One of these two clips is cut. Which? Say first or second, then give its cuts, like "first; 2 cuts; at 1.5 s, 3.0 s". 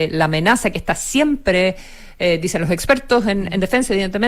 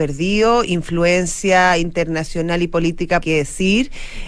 second; 1 cut; at 3.2 s